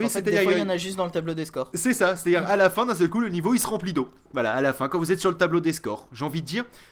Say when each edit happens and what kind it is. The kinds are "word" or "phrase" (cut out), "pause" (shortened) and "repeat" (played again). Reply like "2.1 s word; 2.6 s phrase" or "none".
none